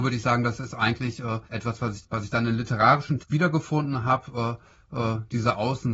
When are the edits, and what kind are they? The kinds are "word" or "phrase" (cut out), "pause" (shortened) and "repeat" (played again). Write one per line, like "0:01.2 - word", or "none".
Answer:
0:01.5 - pause
0:02.0 - word
0:03.2 - word